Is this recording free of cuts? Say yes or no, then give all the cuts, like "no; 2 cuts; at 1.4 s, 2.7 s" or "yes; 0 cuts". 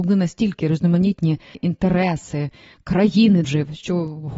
no; 2 cuts; at 1.5 s, 3.4 s